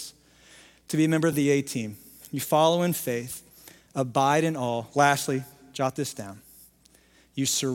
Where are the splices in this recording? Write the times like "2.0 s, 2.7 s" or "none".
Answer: none